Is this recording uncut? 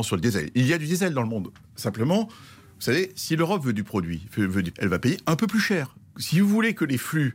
no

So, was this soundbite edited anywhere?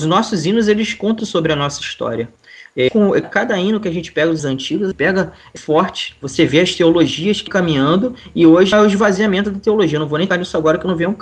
yes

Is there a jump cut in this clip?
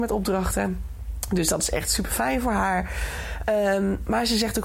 no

